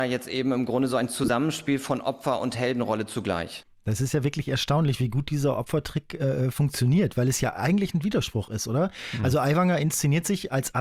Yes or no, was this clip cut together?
no